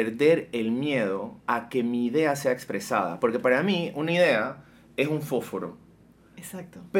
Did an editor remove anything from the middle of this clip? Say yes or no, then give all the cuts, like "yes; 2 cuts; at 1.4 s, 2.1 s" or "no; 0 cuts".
yes; 1 cut; at 1.4 s